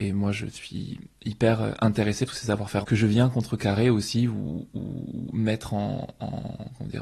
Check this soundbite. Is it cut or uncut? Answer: cut